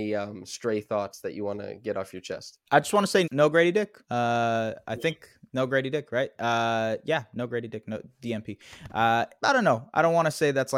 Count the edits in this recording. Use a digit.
4